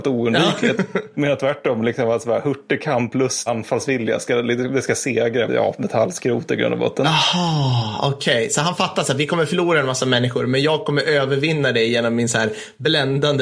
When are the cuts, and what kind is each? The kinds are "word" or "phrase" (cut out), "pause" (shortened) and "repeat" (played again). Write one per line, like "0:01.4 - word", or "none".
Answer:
0:03.5 - word
0:05.5 - word